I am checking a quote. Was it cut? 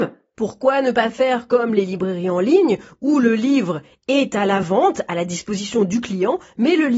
no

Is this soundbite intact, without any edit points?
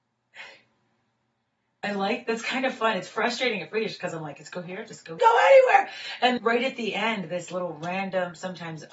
no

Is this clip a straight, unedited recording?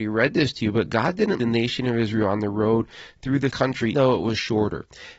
no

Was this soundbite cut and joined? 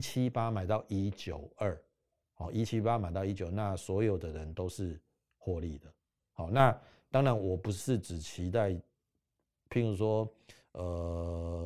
no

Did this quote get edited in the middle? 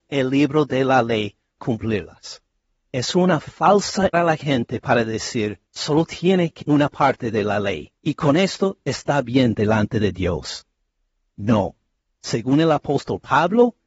yes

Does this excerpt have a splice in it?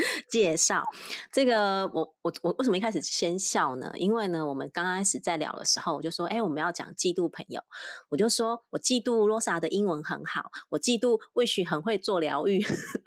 yes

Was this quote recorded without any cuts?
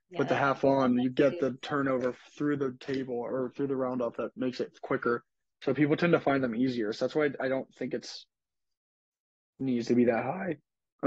yes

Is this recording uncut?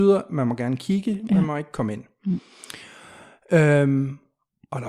yes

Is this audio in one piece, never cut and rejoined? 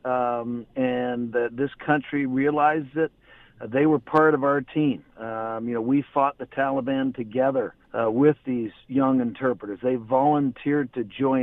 no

